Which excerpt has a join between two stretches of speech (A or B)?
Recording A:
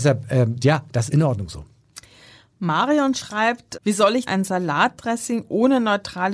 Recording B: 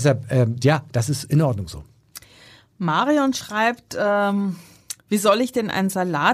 A